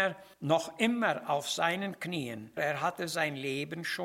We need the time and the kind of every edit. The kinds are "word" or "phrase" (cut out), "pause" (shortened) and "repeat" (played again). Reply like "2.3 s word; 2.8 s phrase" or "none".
2.6 s word